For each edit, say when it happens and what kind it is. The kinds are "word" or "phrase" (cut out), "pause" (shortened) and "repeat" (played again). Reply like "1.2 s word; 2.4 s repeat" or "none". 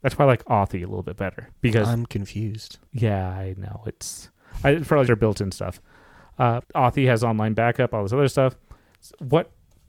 1.5 s pause; 2.9 s pause; 5.1 s word; 6.6 s word